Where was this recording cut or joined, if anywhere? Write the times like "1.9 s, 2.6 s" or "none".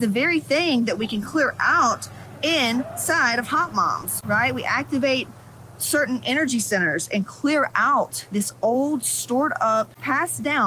none